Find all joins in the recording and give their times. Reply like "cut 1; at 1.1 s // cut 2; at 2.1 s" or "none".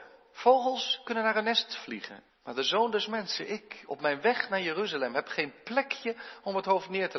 cut 1; at 2.3 s